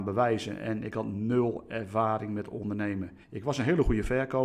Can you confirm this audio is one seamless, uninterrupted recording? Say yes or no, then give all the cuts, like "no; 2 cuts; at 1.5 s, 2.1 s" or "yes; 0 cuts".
no; 1 cut; at 3.2 s